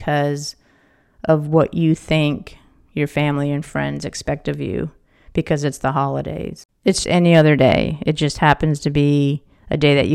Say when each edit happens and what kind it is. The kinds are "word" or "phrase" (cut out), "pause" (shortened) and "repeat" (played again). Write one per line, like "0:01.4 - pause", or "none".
0:07.0 - word

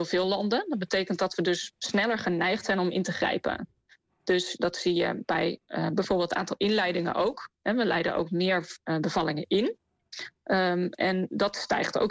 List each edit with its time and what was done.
none

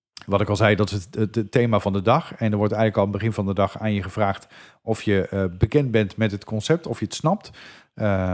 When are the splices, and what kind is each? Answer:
none

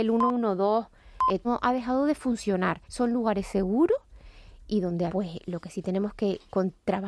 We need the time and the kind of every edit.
0:01.4 - phrase
0:02.8 - pause
0:04.7 - word
0:05.1 - word

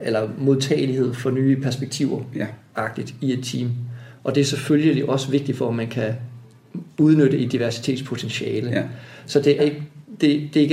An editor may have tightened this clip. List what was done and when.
0:09.6 - word

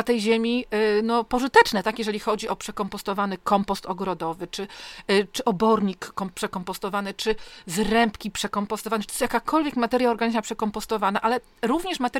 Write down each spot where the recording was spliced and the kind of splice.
none

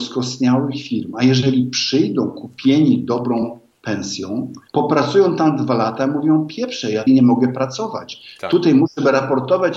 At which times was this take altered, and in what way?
0:04.7 - pause
0:07.1 - word

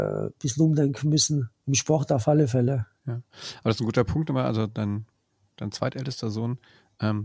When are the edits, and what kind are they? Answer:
0:01.6 - pause
0:03.0 - pause

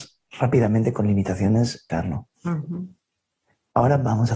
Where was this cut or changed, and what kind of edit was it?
0:01.9 - phrase
0:02.3 - pause

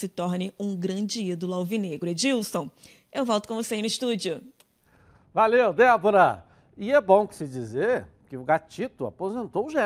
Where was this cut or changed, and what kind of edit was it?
none

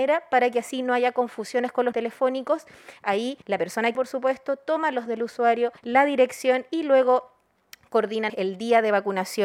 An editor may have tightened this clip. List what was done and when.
0:01.9 - word
0:03.4 - pause
0:03.9 - word
0:05.1 - word
0:05.8 - pause
0:08.3 - word

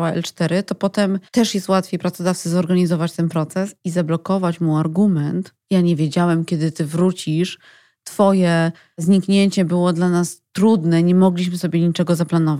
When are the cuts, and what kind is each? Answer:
0:01.3 - pause

